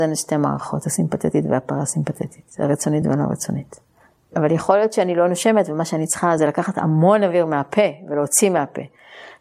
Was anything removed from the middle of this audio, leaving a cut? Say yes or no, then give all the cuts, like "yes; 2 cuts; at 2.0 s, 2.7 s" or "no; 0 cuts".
no; 0 cuts